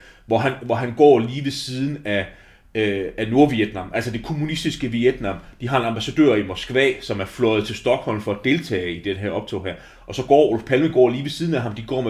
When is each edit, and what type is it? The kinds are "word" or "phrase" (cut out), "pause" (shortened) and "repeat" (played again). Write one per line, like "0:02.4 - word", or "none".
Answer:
none

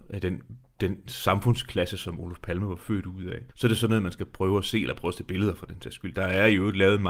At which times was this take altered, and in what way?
0:03.5 - pause

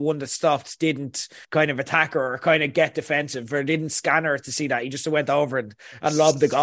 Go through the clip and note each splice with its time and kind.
0:01.4 - pause

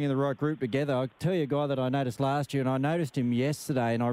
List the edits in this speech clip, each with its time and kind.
none

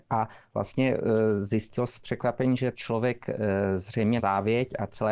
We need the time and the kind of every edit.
0:01.9 - word
0:02.7 - word
0:04.2 - word

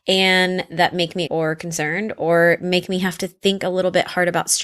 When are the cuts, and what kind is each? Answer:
0:01.3 - word

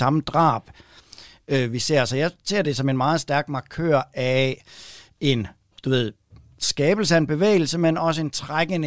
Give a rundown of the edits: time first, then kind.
none

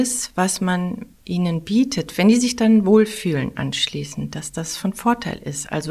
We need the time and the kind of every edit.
0:01.1 - pause

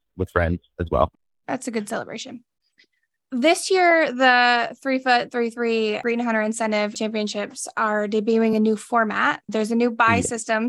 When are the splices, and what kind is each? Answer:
none

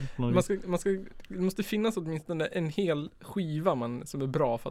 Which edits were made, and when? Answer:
none

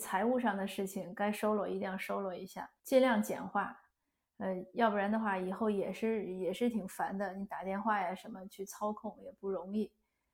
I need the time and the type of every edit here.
0:02.8 - pause

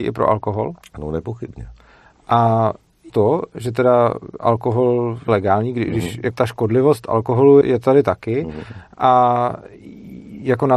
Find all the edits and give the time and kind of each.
0:03.1 - word
0:05.3 - word
0:06.3 - word
0:07.6 - word

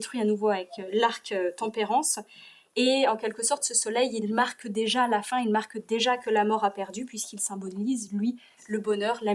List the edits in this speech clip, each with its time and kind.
none

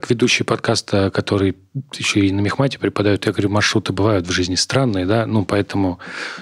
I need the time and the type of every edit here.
none

